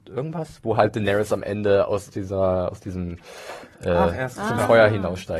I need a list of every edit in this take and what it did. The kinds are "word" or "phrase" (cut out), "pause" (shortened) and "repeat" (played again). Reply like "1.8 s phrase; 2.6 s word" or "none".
none